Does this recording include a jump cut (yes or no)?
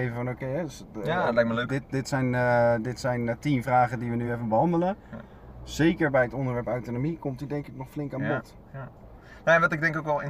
no